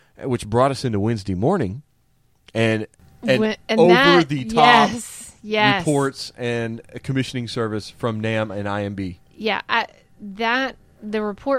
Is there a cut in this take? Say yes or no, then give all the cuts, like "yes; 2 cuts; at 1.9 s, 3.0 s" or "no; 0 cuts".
no; 0 cuts